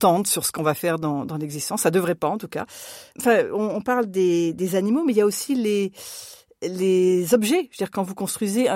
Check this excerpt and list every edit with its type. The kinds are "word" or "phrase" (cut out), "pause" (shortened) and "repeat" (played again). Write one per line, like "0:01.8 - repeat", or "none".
none